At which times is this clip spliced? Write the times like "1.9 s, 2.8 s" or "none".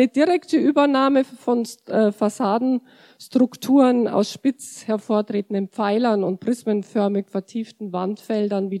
none